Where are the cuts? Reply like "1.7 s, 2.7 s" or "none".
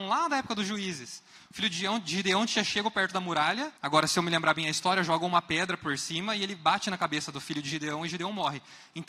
3.8 s

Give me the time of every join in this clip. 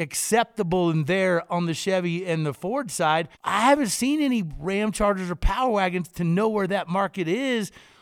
3.3 s

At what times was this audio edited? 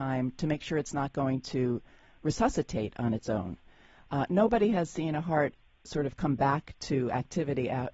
none

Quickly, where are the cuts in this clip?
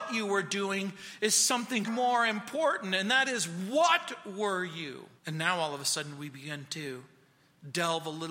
1.8 s, 5.2 s

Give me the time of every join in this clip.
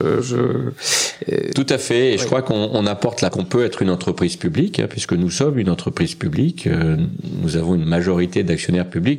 3.3 s

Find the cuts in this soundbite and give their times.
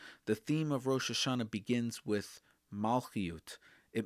none

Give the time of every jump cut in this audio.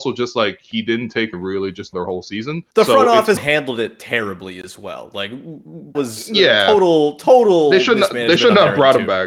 1.3 s, 1.9 s, 2.7 s, 3.4 s, 5.9 s

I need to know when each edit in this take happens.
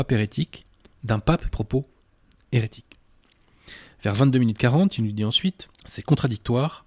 1.5 s, 5.7 s

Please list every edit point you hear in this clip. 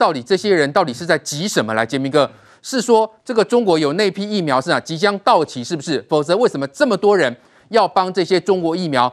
none

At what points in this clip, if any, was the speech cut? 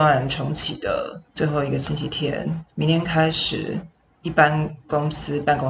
1.3 s, 2.7 s, 4.0 s

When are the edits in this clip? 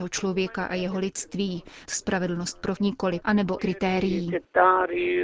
1.9 s, 2.8 s, 3.2 s, 3.6 s

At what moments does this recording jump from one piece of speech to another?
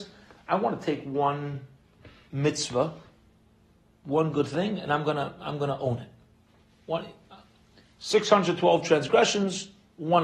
none

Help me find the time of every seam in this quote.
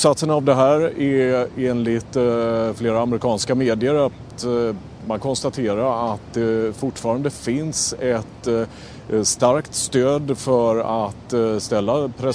5.2 s

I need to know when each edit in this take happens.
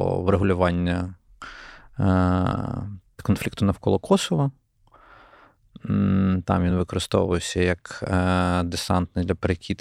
none

